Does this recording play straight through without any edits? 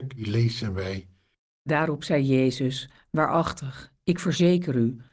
yes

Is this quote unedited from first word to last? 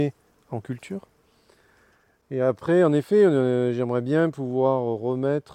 yes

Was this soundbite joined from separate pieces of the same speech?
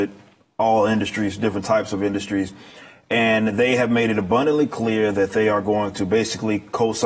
no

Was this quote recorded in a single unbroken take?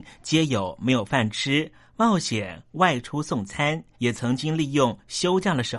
no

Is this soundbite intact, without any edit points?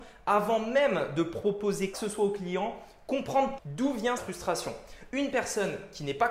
no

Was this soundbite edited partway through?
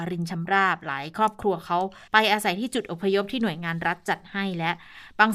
yes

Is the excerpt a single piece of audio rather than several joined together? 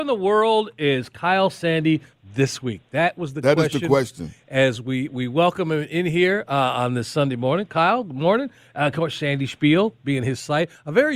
yes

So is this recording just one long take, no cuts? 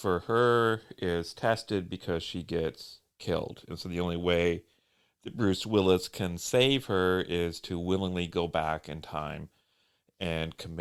yes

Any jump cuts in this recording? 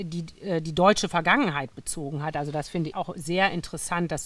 yes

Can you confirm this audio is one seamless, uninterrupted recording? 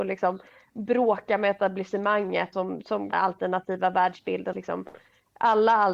no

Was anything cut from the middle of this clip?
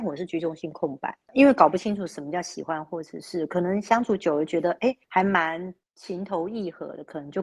yes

